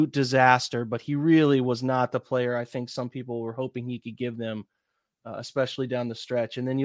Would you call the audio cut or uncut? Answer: uncut